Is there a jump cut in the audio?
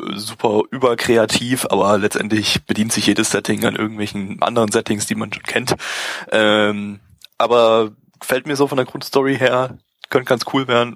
no; 0 cuts

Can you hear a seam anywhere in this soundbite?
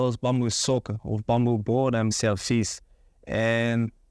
yes; 1 cut; at 2.1 s

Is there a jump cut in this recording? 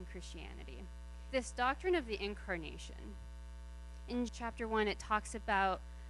yes; 2 cuts; at 1.3 s, 4.3 s

